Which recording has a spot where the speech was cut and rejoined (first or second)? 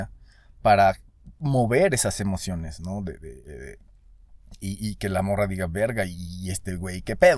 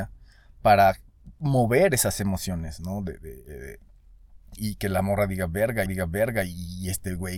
second